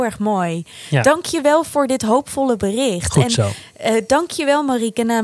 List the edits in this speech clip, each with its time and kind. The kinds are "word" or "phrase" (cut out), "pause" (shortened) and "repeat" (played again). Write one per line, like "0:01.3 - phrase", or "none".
none